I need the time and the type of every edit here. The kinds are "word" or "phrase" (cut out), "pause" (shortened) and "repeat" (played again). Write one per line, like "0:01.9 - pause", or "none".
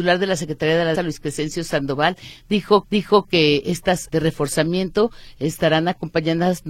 0:00.9 - word
0:02.8 - repeat
0:04.1 - word